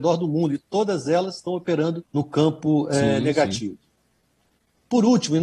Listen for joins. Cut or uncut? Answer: cut